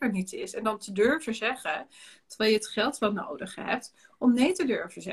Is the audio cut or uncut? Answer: uncut